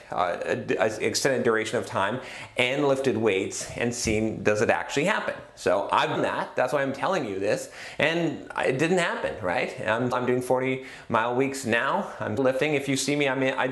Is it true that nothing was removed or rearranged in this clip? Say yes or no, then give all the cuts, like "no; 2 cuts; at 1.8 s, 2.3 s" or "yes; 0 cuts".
no; 3 cuts; at 6.2 s, 10.1 s, 12.4 s